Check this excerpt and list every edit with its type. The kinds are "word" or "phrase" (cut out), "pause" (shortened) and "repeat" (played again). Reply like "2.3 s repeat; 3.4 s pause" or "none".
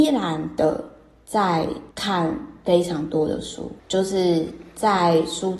1.9 s pause; 3.8 s pause